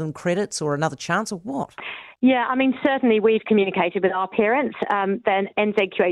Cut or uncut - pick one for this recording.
uncut